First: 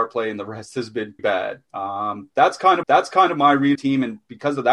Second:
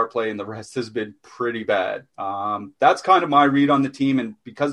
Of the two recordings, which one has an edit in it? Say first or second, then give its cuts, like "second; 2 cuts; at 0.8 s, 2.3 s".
first; 3 cuts; at 1.2 s, 2.8 s, 3.8 s